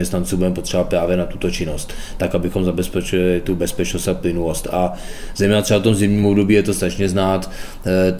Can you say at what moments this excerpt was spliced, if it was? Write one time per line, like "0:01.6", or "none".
none